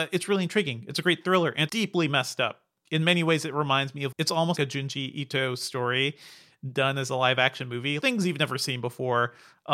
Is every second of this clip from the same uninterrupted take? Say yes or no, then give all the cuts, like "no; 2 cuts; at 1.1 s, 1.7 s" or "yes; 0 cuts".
no; 4 cuts; at 1.7 s, 4.1 s, 4.6 s, 8.0 s